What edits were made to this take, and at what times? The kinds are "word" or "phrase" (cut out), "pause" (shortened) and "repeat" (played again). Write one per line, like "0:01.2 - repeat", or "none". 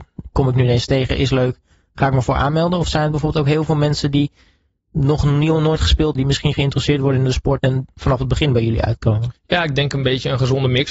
0:06.1 - word
0:07.6 - word
0:09.4 - pause